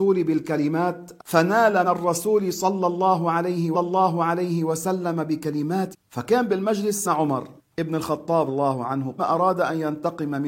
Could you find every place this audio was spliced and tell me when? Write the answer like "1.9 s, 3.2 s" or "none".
1.2 s, 1.8 s, 3.7 s, 5.9 s, 7.0 s, 7.6 s, 8.5 s, 9.2 s